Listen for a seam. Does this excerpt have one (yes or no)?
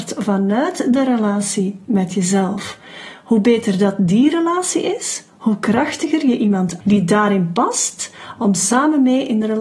yes